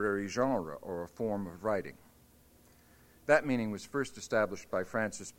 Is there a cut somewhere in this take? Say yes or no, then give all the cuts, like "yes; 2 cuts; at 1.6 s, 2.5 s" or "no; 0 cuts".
no; 0 cuts